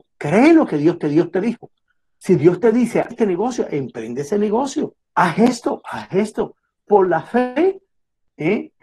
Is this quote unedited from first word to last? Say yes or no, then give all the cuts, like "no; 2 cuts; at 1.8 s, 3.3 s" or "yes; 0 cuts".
no; 3 cuts; at 1.0 s, 3.1 s, 5.0 s